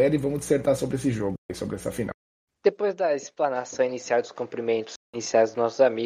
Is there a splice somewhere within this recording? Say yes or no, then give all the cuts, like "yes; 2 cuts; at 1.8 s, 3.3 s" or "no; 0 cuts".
no; 0 cuts